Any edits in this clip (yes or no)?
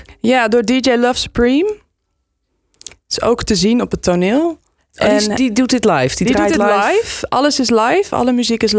yes